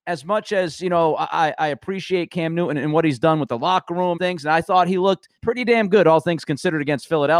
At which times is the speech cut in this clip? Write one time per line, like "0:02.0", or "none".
0:04.2
0:05.4